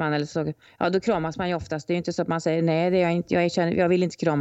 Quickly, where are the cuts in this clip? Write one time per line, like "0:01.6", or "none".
none